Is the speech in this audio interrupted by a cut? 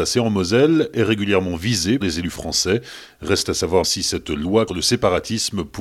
yes; 3 cuts; at 2.0 s, 3.8 s, 4.7 s

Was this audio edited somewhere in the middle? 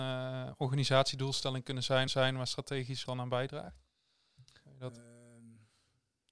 yes; 2 cuts; at 2.1 s, 3.1 s

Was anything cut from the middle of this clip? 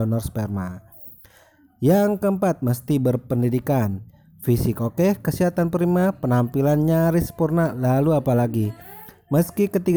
no; 0 cuts

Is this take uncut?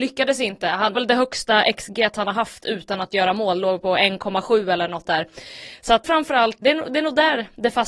no; 4 cuts; at 0.9 s, 5.0 s, 6.0 s, 6.6 s

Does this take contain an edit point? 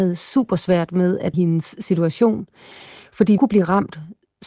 yes; 2 cuts; at 1.3 s, 3.4 s

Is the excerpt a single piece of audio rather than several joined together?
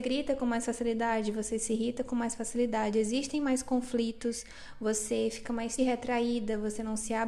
no; 1 cut; at 5.8 s

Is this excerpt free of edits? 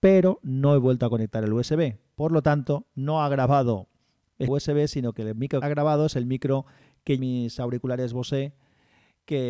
no; 3 cuts; at 4.5 s, 5.6 s, 7.2 s

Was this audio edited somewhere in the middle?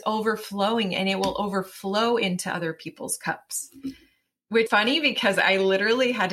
yes; 1 cut; at 4.7 s

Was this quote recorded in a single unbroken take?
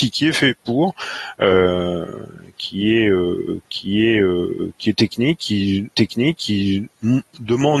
no; 2 cuts; at 3.6 s, 5.9 s

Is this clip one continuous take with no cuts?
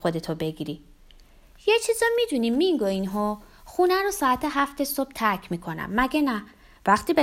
yes; 0 cuts

